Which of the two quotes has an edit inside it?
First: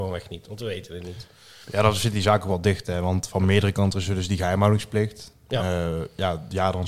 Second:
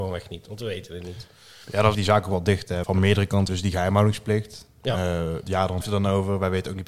second; 5 cuts; at 1.9 s, 2.8 s, 3.5 s, 5.4 s, 5.8 s

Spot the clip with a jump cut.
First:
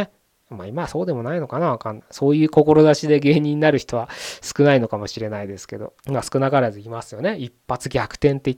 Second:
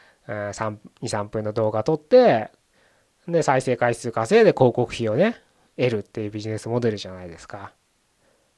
first; 1 cut; at 6.0 s

